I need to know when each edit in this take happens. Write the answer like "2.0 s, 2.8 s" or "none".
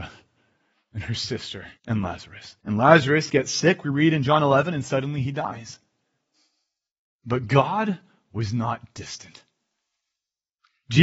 1.8 s, 2.6 s, 6.9 s